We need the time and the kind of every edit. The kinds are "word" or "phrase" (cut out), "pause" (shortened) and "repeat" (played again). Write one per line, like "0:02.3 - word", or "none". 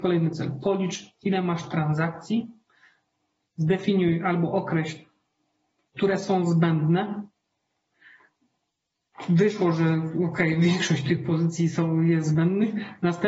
none